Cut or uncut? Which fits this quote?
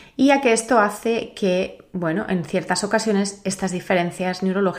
uncut